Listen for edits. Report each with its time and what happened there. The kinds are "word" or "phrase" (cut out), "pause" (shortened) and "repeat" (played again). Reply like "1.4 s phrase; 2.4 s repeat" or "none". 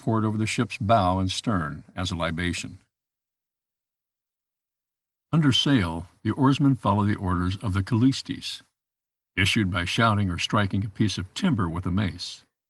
none

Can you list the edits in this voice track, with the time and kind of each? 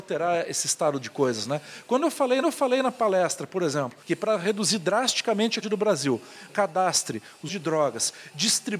2.4 s repeat; 4.0 s pause; 5.6 s word; 6.5 s phrase; 7.5 s word

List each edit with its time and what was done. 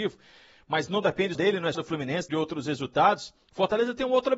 1.3 s word; 1.7 s phrase; 2.3 s word; 3.4 s pause

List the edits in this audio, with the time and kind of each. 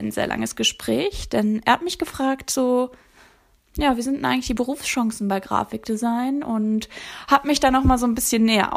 none

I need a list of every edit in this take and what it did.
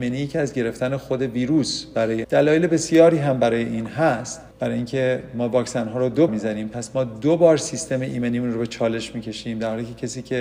2.2 s phrase; 4.5 s pause; 6.3 s word

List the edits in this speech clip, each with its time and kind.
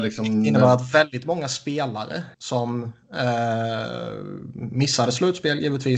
2.3 s pause

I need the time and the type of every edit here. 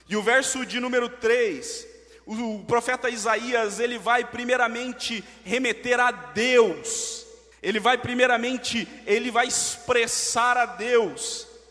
7.5 s pause

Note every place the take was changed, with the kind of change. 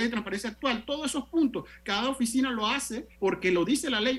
3.1 s pause

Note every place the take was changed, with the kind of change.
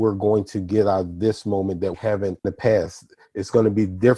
1.9 s word; 2.4 s word

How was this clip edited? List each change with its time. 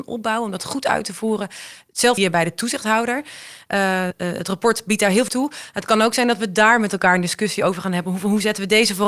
2.2 s word; 4.1 s word; 5.3 s word

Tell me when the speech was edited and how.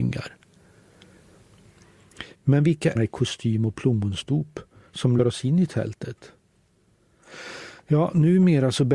2.3 s pause; 2.9 s phrase; 5.2 s word

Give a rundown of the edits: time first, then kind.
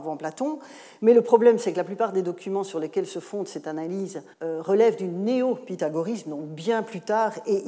4.3 s pause

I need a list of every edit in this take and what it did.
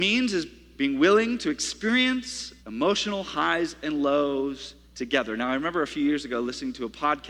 2.6 s pause; 4.8 s pause

